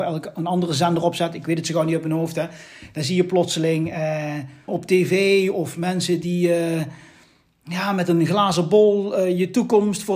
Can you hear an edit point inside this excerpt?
yes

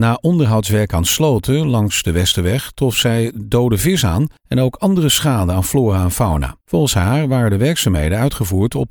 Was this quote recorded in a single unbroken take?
no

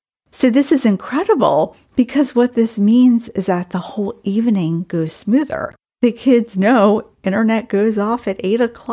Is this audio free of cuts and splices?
no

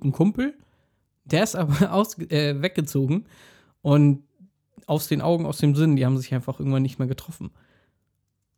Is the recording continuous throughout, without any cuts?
yes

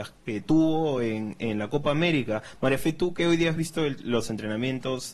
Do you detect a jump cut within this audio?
no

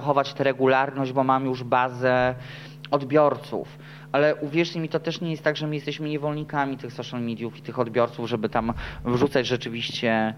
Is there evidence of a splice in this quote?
no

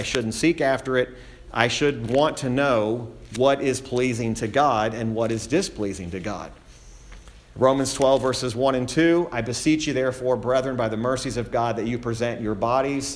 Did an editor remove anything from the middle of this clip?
no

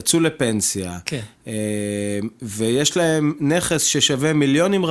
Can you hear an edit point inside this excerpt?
no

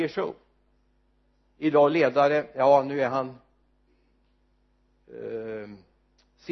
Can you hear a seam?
no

